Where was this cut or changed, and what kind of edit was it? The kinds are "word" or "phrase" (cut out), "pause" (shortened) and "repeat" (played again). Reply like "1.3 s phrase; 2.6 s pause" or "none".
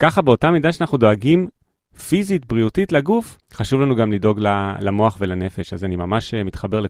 3.4 s pause